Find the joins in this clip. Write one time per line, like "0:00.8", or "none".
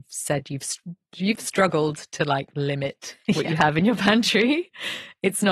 none